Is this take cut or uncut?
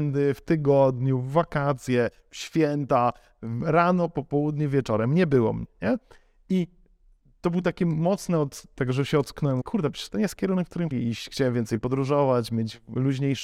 cut